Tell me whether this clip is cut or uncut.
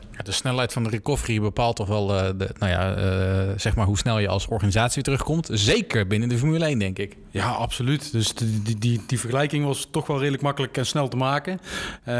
uncut